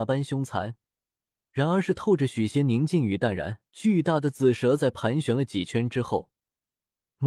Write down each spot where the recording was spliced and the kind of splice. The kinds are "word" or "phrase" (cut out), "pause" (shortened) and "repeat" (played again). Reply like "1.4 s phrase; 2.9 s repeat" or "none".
3.7 s pause